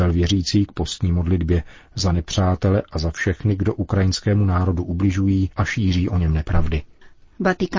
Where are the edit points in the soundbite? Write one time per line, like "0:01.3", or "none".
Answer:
0:05.5